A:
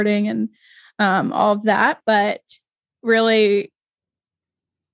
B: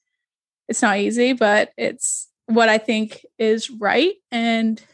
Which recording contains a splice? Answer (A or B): B